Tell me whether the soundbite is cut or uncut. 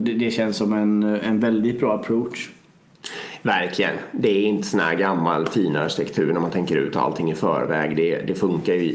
uncut